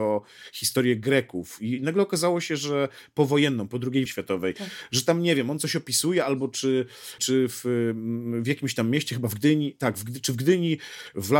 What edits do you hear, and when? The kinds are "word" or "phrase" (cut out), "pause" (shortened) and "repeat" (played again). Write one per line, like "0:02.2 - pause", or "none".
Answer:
0:04.1 - word
0:07.2 - word